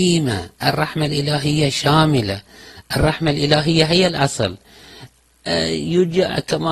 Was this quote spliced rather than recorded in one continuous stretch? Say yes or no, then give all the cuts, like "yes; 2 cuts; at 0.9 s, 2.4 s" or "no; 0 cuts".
no; 0 cuts